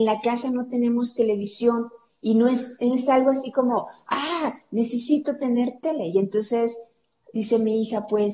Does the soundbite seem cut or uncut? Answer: uncut